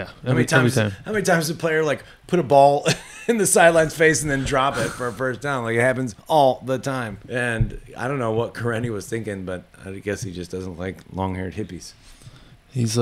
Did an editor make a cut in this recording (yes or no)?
yes